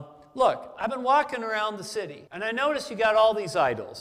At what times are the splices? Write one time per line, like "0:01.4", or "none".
0:02.3